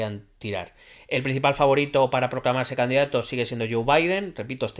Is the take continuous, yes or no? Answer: yes